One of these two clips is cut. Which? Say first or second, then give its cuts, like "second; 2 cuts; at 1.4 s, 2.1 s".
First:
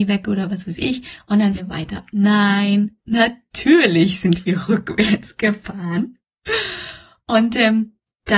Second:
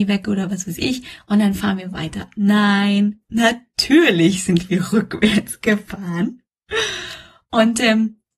first; 1 cut; at 1.6 s